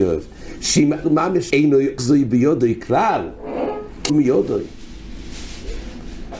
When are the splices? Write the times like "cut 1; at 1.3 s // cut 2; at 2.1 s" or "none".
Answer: cut 1; at 1.0 s // cut 2; at 1.5 s // cut 3; at 2.0 s // cut 4; at 4.1 s